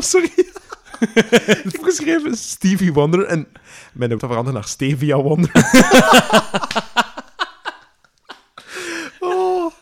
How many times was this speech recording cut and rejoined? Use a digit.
2